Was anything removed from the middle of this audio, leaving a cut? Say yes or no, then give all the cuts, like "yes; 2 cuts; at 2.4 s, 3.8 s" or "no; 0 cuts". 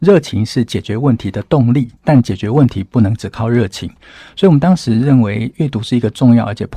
yes; 1 cut; at 2.0 s